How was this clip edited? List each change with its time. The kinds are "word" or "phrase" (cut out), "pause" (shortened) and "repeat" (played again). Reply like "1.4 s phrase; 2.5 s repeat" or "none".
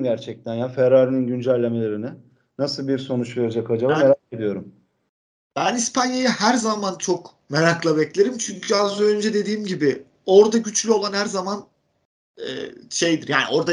none

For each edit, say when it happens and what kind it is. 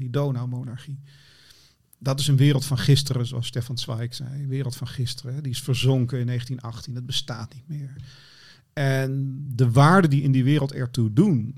none

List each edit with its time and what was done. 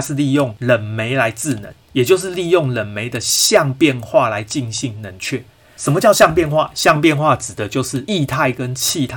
none

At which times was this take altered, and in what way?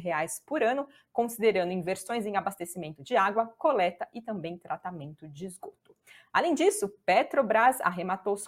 none

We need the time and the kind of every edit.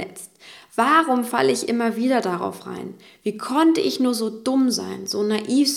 none

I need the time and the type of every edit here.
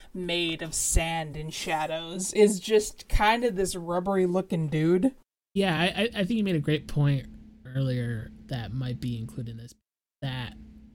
none

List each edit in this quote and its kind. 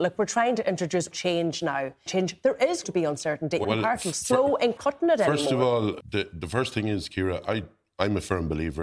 1.1 s word; 2.1 s phrase; 2.8 s word; 3.6 s phrase; 4.8 s phrase; 6.0 s word

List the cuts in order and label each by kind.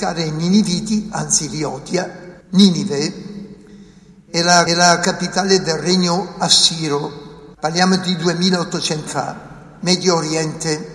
2.4 s pause; 4.7 s repeat; 7.5 s pause; 9.1 s word

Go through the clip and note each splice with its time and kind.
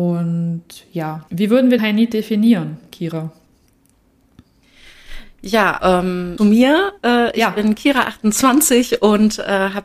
1.3 s pause; 1.8 s word; 5.8 s word; 6.4 s phrase

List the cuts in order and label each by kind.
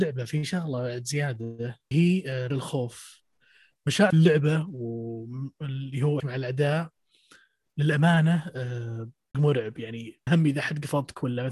1.9 s word; 2.5 s word; 4.1 s word; 6.2 s word; 9.3 s word; 10.3 s word

